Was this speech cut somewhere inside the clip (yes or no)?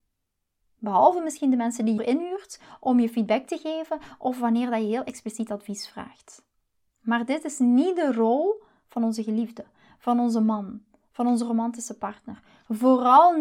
yes